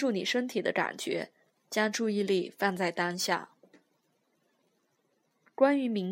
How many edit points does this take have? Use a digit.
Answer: 0